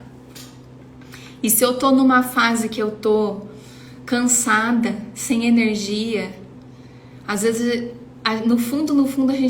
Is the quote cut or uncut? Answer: uncut